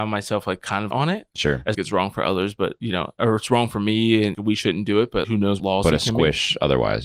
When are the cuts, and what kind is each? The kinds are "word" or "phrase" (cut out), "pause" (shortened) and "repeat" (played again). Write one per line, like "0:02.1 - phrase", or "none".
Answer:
0:00.9 - word
0:01.7 - word
0:04.3 - word
0:05.2 - word
0:05.6 - word